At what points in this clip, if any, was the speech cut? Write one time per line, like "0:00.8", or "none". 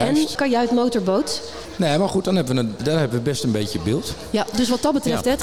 none

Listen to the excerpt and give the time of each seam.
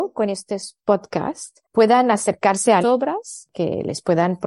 0:01.6
0:02.8

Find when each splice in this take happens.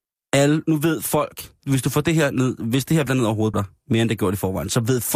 0:01.6
0:03.1
0:03.5

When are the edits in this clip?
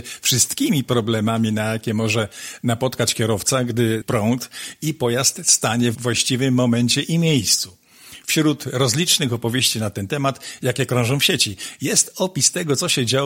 0:04.0
0:05.9

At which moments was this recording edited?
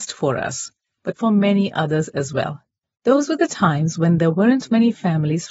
0:02.8

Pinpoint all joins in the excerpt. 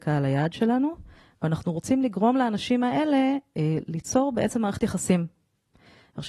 none

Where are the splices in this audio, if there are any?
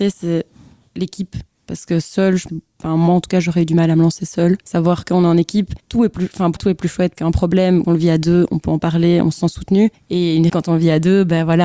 0:02.5
0:04.6
0:05.8
0:06.6
0:07.2
0:07.8
0:09.9
0:10.5

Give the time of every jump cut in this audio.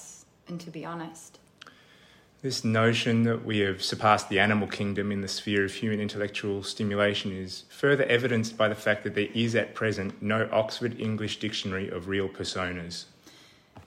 none

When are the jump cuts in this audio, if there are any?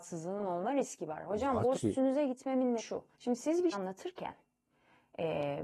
0:01.7
0:02.8
0:03.1
0:03.7

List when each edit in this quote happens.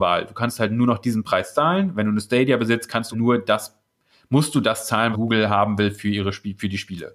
0:03.1
0:05.1

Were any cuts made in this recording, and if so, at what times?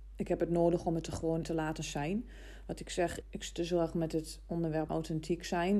0:01.4
0:03.2
0:04.9

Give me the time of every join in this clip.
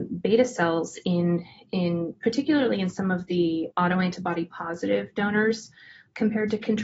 0:03.7

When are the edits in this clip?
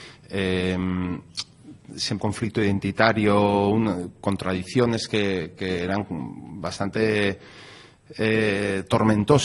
0:02.2

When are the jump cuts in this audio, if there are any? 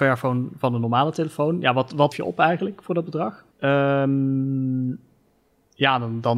0:02.1
0:03.5

